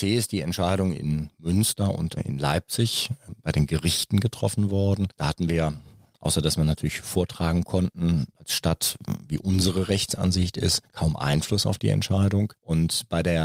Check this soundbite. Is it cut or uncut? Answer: cut